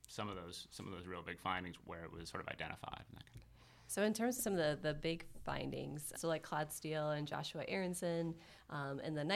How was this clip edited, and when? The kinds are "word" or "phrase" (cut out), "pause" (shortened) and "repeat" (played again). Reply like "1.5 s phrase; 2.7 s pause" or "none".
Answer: 1.8 s word; 4.4 s word; 6.1 s word